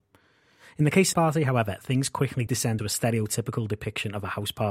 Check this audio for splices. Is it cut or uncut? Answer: cut